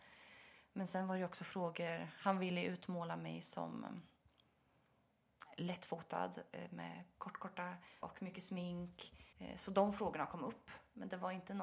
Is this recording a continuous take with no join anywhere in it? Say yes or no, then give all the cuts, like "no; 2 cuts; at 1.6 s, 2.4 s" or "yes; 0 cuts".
no; 2 cuts; at 8.0 s, 9.3 s